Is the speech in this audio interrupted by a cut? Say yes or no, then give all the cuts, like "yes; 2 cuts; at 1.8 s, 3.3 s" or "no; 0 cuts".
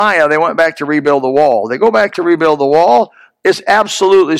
no; 0 cuts